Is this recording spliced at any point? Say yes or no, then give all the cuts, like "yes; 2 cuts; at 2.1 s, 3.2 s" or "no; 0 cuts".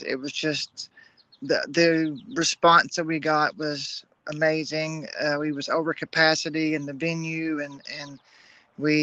no; 0 cuts